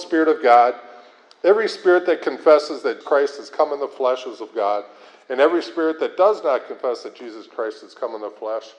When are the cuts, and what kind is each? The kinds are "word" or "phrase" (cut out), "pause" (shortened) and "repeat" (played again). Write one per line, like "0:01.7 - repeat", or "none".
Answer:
0:03.0 - word